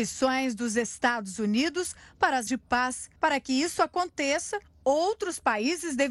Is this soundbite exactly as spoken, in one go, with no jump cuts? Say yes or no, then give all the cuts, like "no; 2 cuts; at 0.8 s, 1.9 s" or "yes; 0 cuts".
no; 2 cuts; at 2.5 s, 3.2 s